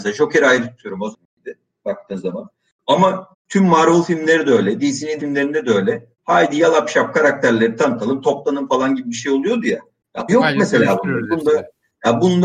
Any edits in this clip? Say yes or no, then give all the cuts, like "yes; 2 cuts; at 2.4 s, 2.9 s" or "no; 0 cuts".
yes; 5 cuts; at 1.1 s, 3.3 s, 5.2 s, 6.1 s, 10.3 s